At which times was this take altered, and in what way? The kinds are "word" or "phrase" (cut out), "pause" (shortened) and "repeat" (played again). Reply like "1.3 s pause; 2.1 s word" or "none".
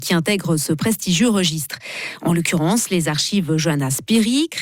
none